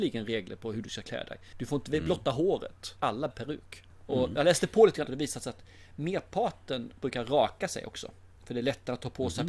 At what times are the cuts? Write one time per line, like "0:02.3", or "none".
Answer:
0:03.0
0:03.3
0:05.1
0:08.4